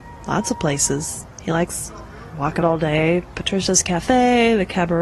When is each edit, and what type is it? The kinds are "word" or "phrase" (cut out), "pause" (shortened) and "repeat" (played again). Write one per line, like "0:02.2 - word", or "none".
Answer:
0:02.6 - word